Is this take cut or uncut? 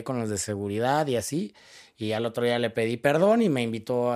uncut